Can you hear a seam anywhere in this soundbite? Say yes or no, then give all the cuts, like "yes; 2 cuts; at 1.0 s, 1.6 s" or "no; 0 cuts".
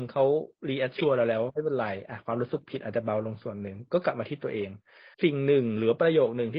yes; 1 cut; at 5.1 s